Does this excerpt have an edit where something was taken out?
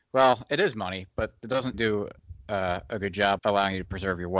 yes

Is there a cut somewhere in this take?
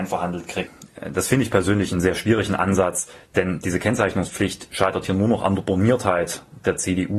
no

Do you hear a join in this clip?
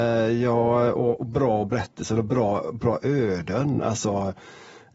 no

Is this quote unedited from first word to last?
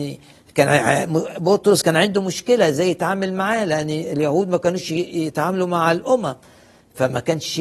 yes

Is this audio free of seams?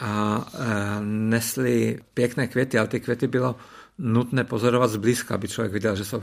yes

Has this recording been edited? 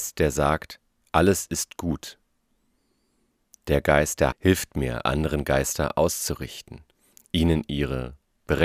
yes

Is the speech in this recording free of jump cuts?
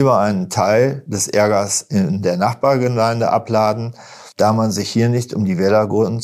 no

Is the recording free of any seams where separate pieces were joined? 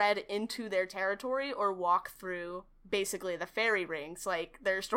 yes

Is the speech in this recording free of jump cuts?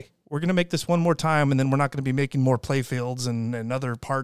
yes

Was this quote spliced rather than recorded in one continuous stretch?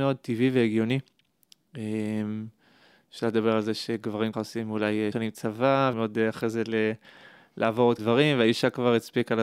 yes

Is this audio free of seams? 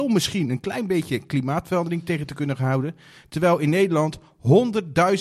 yes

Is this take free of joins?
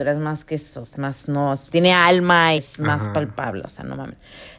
no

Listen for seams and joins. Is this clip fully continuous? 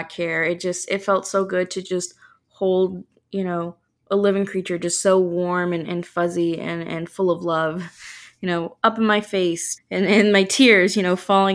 no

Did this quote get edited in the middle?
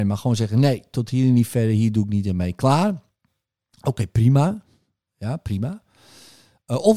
no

